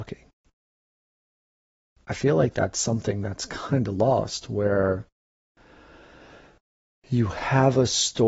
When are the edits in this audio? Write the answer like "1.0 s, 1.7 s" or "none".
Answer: none

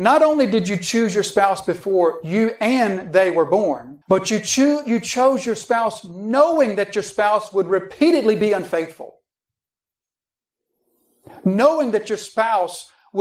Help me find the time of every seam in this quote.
4.0 s

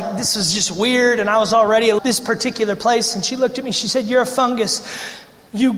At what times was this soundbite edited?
2.0 s

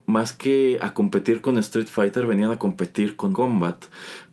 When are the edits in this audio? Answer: 3.3 s

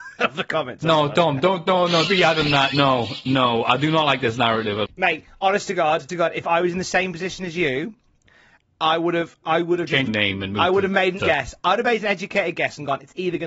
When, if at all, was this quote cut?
2.1 s, 4.9 s, 6.1 s, 9.4 s, 10.1 s, 11.2 s

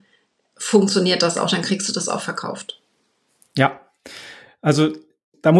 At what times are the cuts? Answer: none

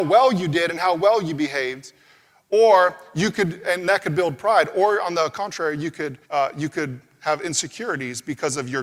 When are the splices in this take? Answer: 6.2 s

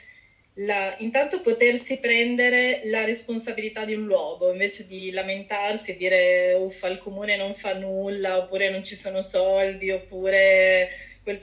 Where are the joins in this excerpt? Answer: none

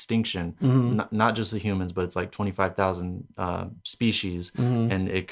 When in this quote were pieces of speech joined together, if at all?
3.8 s

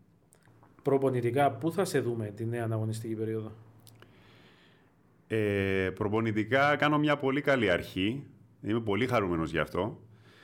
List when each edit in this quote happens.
none

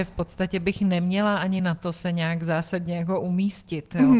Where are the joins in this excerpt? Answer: none

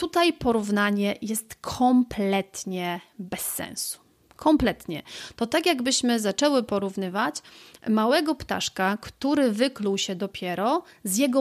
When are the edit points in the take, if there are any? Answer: none

